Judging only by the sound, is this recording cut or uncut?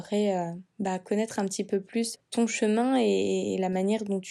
cut